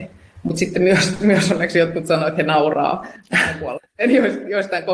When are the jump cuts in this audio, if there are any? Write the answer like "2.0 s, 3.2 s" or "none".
none